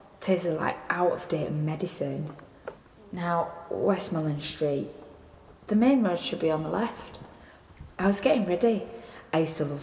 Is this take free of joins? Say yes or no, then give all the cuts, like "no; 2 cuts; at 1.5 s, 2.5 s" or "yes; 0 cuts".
no; 2 cuts; at 5.6 s, 7.9 s